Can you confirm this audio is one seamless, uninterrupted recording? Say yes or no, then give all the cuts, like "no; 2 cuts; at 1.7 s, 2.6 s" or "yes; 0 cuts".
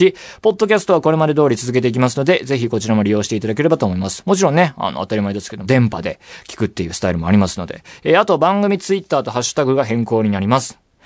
no; 1 cut; at 5.6 s